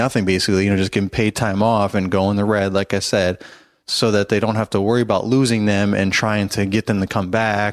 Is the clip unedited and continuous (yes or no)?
yes